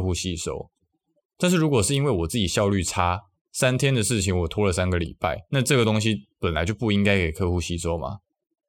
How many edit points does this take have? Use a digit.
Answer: 1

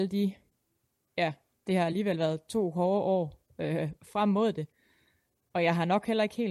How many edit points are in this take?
0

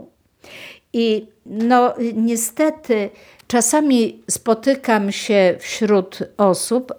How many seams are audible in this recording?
0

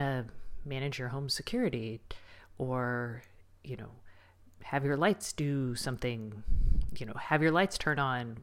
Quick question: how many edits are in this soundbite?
0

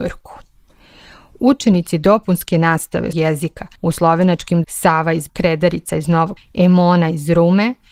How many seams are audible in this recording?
5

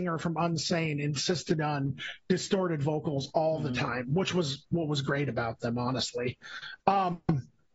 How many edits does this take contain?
0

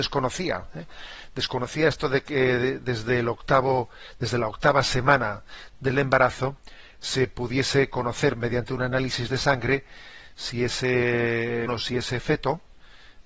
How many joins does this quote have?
1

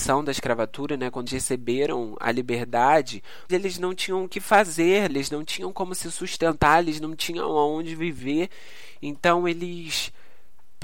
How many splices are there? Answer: 3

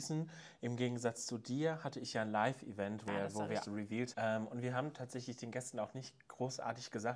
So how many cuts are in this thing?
3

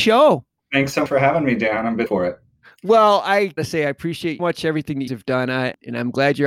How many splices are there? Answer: 5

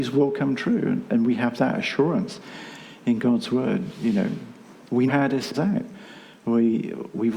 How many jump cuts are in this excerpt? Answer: 2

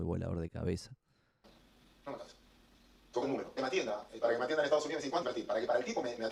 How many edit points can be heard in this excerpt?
4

